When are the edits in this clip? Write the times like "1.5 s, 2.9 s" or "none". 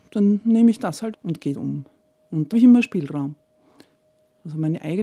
1.1 s, 1.5 s, 2.5 s